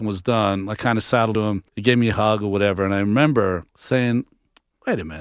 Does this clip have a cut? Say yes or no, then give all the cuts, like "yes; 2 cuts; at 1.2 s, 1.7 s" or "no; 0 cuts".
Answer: yes; 3 cuts; at 1.3 s, 1.7 s, 3.7 s